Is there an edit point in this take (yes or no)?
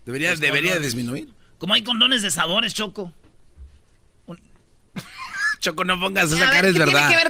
no